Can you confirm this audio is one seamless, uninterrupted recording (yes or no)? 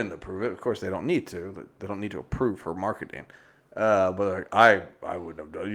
yes